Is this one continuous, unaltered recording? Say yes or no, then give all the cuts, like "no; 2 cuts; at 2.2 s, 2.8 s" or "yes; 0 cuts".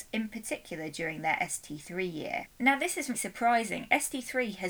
no; 1 cut; at 3.1 s